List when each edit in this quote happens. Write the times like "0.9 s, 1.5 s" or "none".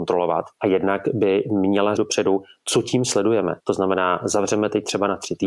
2.0 s, 3.6 s